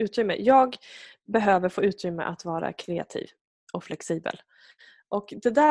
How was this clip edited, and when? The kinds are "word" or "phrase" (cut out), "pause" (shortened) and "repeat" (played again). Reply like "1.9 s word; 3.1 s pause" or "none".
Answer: none